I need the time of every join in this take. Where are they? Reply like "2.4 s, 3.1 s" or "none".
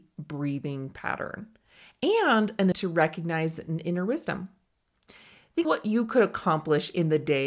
2.7 s, 5.6 s